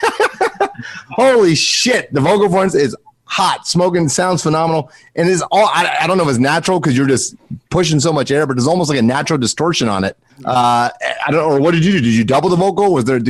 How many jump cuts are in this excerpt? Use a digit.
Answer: 1